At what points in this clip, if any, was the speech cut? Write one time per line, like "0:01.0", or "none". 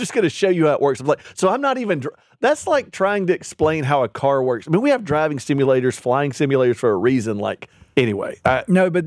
none